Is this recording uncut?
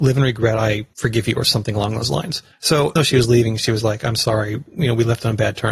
no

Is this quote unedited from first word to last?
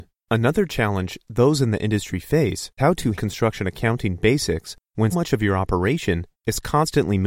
no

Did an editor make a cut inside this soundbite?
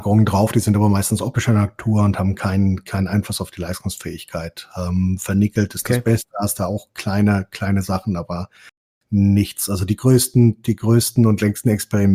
no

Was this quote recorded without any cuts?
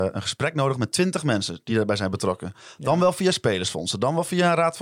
yes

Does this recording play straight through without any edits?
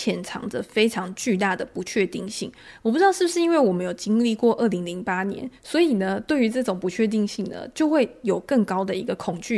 yes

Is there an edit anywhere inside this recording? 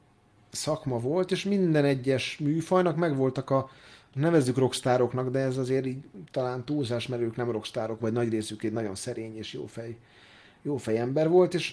yes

